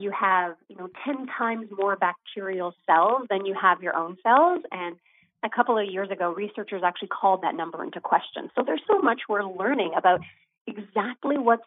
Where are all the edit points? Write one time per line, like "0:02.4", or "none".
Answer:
0:08.8